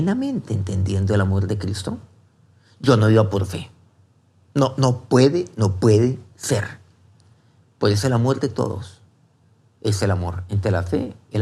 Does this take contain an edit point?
no; 0 cuts

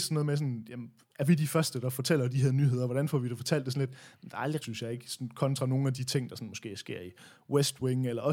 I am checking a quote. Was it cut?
yes; 1 cut; at 4.6 s

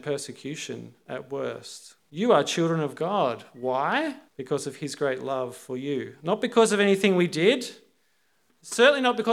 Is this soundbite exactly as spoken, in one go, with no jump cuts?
no; 2 cuts; at 2.0 s, 4.3 s

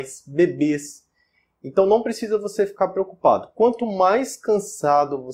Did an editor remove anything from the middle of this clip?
no; 0 cuts

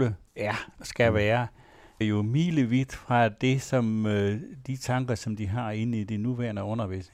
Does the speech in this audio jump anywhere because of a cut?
yes; 1 cut; at 2.0 s

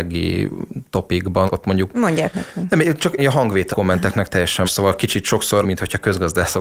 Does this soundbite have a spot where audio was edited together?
yes; 6 cuts; at 1.5 s, 2.3 s, 3.2 s, 3.7 s, 4.6 s, 5.6 s

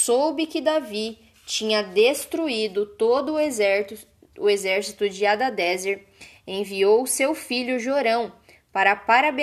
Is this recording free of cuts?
yes; 0 cuts

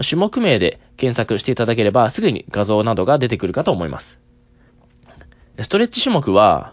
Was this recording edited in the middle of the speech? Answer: no; 0 cuts

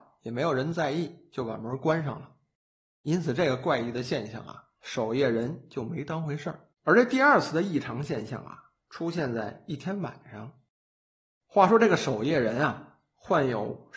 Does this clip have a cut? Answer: yes; 2 cuts; at 4.8 s, 6.7 s

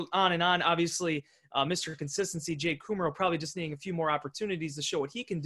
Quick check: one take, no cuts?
yes; 0 cuts

